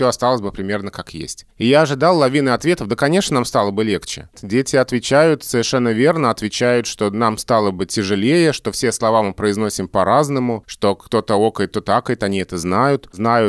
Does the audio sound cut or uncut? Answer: uncut